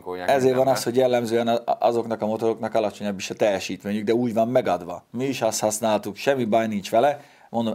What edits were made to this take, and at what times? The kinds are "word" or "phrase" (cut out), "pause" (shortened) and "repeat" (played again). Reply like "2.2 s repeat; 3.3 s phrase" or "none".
none